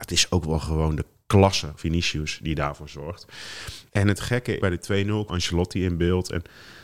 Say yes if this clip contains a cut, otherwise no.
yes